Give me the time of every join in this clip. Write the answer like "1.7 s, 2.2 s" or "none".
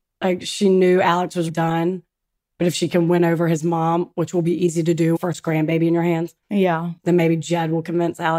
1.5 s, 5.2 s, 6.4 s